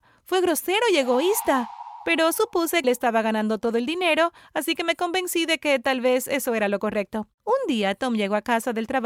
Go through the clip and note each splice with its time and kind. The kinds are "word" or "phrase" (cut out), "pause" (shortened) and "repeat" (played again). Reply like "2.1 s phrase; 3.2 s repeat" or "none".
2.8 s word; 7.3 s pause